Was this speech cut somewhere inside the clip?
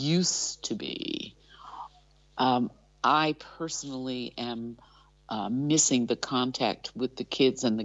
no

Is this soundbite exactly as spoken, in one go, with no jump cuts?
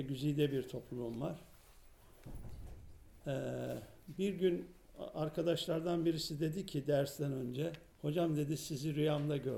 no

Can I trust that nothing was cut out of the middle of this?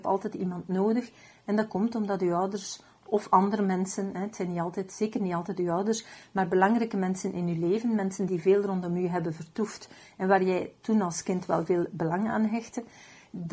yes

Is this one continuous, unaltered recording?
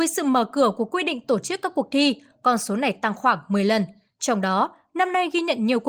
yes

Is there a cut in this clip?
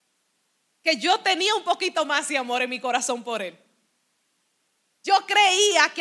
no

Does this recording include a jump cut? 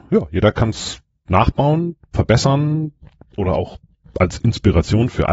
no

